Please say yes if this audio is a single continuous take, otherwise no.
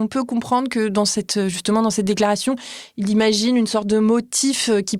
yes